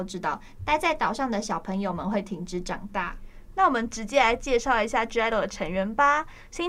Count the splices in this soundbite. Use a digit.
0